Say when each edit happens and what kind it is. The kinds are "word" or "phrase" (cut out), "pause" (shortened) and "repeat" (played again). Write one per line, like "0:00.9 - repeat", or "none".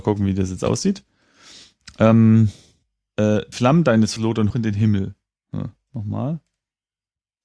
0:03.5 - word
0:04.2 - word
0:04.5 - word
0:05.9 - word